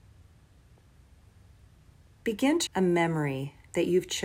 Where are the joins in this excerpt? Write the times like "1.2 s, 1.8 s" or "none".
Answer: 2.7 s